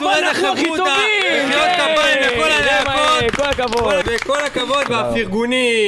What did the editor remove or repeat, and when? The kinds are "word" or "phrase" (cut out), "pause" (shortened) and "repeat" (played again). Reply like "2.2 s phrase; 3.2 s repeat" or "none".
4.0 s word; 4.9 s word